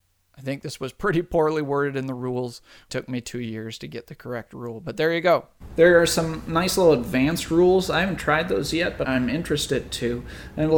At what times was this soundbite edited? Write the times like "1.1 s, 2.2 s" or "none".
2.9 s, 9.0 s